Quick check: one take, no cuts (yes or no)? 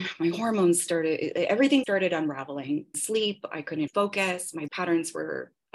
no